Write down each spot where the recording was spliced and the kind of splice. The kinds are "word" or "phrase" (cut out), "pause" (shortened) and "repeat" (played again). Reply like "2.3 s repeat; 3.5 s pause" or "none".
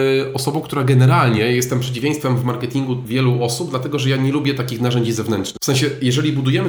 none